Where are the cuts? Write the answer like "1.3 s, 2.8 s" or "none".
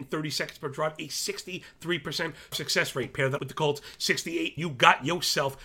2.5 s, 3.4 s, 4.6 s